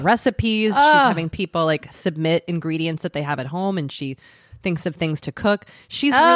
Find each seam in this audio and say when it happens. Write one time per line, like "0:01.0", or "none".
none